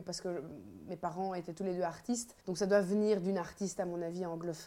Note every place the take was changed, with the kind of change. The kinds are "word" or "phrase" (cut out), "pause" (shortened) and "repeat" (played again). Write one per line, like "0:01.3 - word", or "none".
0:02.4 - pause